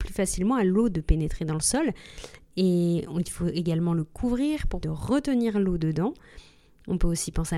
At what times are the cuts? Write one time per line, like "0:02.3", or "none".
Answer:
0:04.8